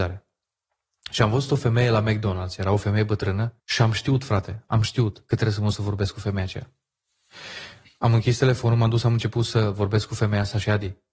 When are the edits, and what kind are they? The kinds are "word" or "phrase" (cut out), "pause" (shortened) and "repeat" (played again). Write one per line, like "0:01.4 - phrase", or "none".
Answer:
0:03.6 - pause